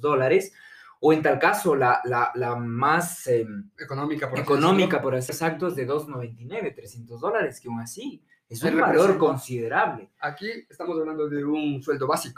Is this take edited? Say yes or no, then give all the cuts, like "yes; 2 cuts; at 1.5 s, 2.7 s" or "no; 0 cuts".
yes; 1 cut; at 5.3 s